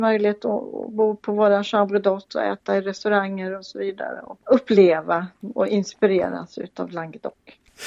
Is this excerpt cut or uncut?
uncut